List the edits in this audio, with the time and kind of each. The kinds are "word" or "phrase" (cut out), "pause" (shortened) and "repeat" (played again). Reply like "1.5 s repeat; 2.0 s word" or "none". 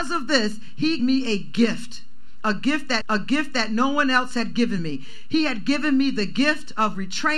1.0 s word; 3.0 s repeat